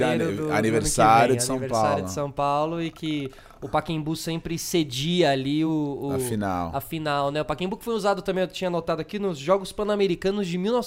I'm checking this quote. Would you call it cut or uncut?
uncut